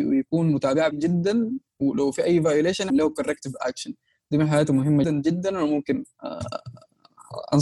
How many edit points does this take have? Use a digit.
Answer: 3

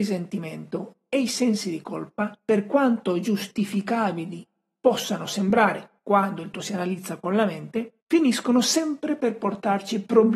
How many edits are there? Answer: 4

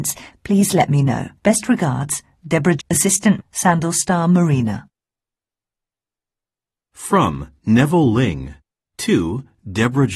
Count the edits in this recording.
4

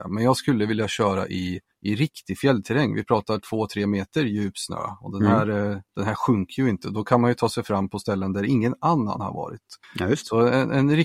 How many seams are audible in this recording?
3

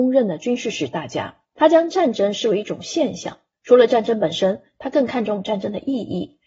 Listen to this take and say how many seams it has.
2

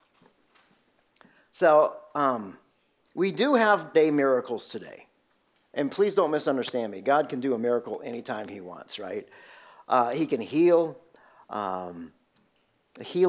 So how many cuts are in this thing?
1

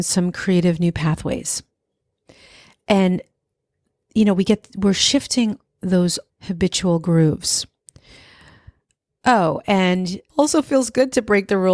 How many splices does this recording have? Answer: 2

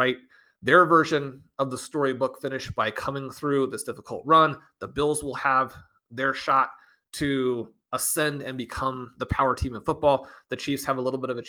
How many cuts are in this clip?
0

